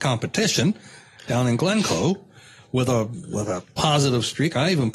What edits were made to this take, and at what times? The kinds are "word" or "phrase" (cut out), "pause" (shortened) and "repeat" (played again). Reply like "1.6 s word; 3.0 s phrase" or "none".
none